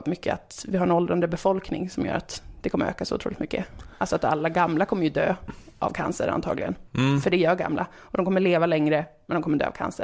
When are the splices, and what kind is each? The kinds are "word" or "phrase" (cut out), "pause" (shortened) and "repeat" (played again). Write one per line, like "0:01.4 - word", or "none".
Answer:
0:06.9 - pause